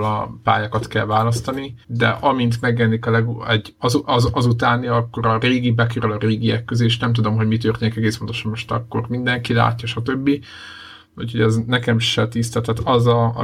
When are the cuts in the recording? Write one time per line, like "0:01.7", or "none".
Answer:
0:01.8